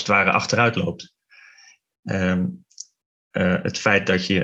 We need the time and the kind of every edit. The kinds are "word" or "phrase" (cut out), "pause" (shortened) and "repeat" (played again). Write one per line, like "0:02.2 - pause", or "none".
none